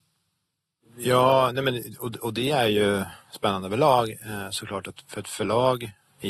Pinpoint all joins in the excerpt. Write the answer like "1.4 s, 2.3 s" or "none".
none